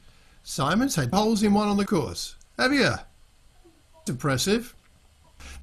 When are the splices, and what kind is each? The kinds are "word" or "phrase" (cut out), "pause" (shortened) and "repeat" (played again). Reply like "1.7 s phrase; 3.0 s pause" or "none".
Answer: 1.1 s word; 1.9 s word; 4.1 s word